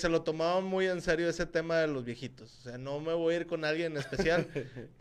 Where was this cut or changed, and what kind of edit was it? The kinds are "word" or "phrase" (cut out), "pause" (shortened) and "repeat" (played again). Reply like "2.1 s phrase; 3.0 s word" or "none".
none